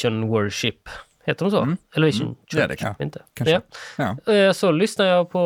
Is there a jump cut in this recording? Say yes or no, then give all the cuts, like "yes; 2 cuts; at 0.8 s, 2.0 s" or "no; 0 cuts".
yes; 1 cut; at 2.8 s